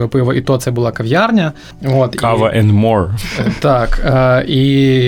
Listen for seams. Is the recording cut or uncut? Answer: uncut